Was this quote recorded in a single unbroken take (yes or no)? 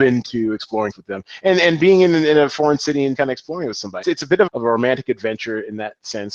no